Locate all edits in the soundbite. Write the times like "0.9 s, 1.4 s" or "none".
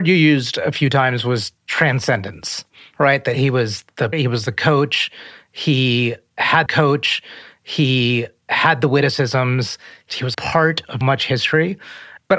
4.1 s, 6.7 s, 10.3 s, 11.0 s